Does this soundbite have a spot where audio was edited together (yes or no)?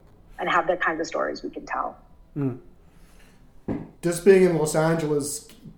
yes